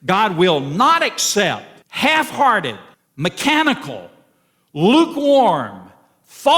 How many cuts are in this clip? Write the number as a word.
two